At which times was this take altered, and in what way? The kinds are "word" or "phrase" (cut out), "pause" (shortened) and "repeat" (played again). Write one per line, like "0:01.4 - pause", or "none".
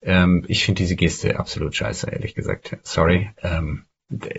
0:03.4 - word